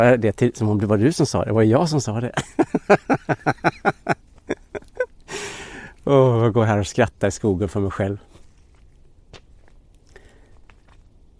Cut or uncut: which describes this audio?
uncut